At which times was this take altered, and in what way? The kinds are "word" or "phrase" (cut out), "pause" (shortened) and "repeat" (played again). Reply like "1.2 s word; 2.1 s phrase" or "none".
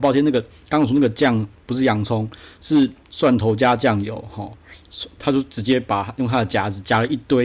5.2 s phrase